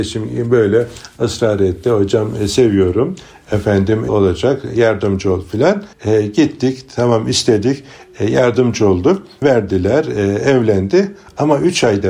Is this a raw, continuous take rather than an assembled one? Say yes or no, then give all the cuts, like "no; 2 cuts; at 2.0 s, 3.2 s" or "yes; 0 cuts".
no; 3 cuts; at 4.1 s, 5.9 s, 9.4 s